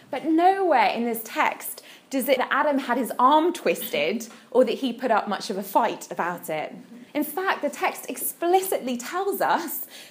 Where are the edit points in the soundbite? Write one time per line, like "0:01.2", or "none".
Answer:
0:02.4
0:07.1